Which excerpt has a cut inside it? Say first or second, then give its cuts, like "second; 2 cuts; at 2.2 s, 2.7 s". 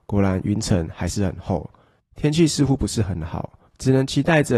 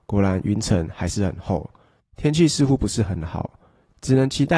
first; 1 cut; at 3.7 s